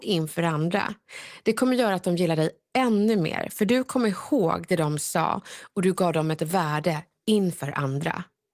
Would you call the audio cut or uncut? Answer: uncut